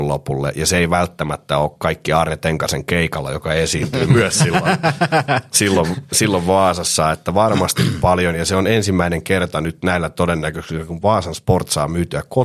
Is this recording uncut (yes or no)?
yes